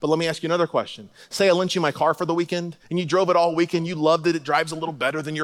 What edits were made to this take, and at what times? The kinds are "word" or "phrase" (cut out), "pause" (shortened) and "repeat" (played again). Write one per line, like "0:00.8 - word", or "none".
0:02.8 - pause